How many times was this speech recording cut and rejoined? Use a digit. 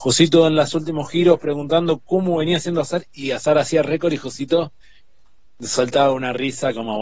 0